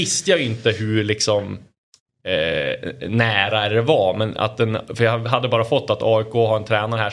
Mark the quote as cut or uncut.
uncut